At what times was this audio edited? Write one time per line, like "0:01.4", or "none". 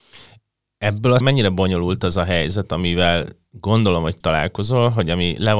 0:01.2
0:04.2